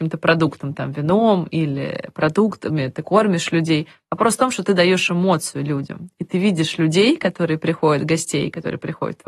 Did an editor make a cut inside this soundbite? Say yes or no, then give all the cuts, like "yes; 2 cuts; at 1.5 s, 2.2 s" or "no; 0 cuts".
no; 0 cuts